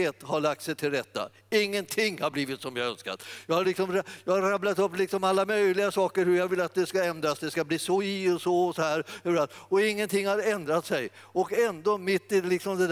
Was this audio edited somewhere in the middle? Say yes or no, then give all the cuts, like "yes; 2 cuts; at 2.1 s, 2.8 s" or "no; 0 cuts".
no; 0 cuts